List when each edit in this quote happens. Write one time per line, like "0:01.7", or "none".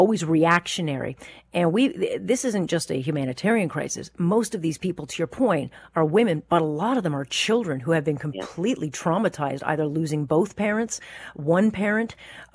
none